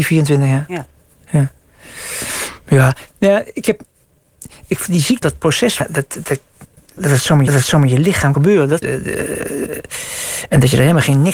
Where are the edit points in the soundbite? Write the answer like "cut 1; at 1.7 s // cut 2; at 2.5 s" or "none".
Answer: cut 1; at 3.1 s // cut 2; at 5.2 s // cut 3; at 5.8 s // cut 4; at 7.0 s // cut 5; at 7.5 s // cut 6; at 8.3 s // cut 7; at 8.8 s